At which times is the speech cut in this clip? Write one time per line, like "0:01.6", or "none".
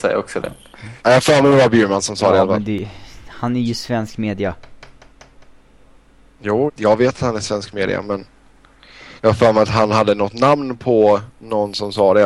0:01.0
0:06.7
0:09.2